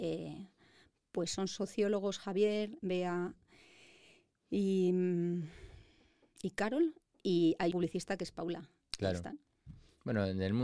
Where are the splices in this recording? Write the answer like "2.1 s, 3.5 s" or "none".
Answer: 2.8 s, 7.7 s